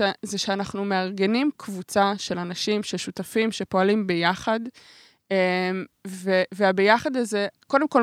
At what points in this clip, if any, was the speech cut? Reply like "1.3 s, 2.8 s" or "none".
none